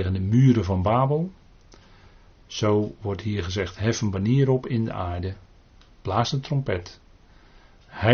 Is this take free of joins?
yes; 0 cuts

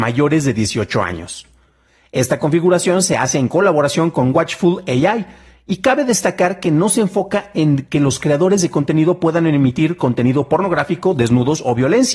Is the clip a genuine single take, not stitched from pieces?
yes; 0 cuts

